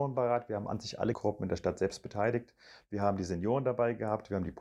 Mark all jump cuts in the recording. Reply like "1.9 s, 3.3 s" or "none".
1.1 s